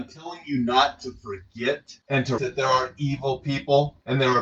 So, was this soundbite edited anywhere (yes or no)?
yes